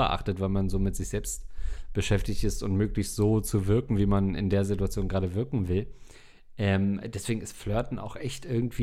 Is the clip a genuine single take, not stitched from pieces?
yes; 0 cuts

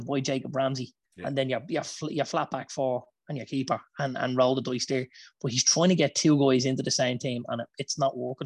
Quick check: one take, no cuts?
no; 1 cut; at 1.0 s

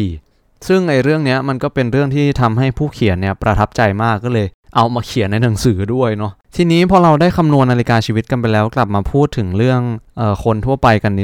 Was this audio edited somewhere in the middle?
yes; 1 cut; at 6.4 s

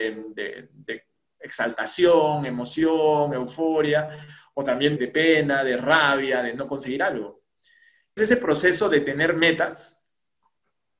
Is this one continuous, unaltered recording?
no; 2 cuts; at 5.0 s, 8.2 s

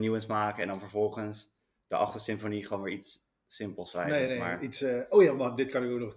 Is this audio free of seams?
yes; 0 cuts

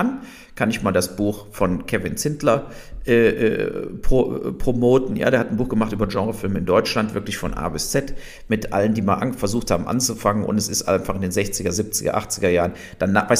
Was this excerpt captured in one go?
yes; 0 cuts

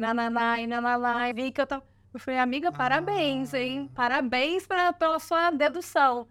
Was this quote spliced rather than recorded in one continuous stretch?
yes; 2 cuts; at 1.3 s, 2.0 s

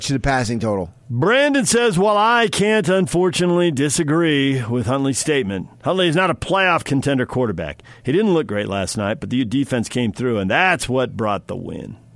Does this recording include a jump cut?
yes; 1 cut; at 1.0 s

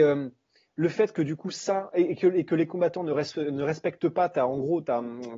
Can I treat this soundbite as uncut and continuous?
yes; 0 cuts

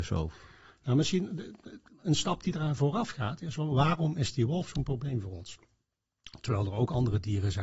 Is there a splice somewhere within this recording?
no; 0 cuts

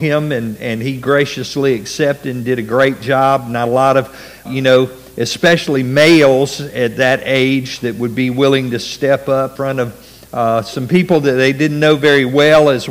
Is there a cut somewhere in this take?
yes; 2 cuts; at 4.5 s, 9.6 s

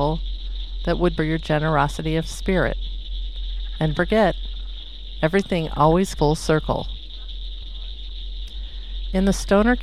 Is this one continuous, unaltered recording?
no; 3 cuts; at 1.2 s, 3.9 s, 6.2 s

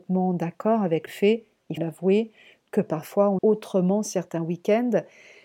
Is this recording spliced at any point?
yes; 3 cuts; at 1.1 s, 1.8 s, 3.4 s

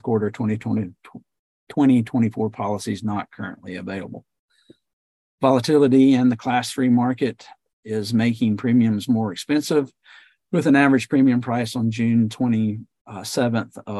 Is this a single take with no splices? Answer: yes; 0 cuts

